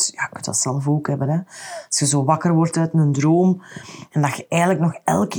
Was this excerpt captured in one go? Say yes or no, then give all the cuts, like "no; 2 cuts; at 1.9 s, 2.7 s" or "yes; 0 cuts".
yes; 0 cuts